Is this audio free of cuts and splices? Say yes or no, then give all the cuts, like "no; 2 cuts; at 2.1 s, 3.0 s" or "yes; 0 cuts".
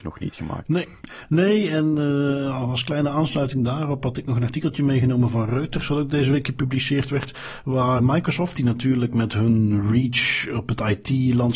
no; 1 cut; at 8.0 s